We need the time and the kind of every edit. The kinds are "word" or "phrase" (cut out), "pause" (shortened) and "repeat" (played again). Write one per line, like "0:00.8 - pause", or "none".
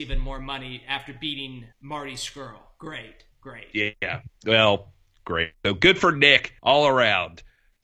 0:01.7 - pause
0:03.3 - pause
0:04.4 - pause
0:06.6 - pause